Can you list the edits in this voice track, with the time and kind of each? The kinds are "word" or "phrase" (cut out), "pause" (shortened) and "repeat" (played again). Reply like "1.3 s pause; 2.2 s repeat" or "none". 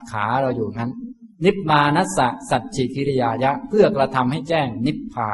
1.3 s pause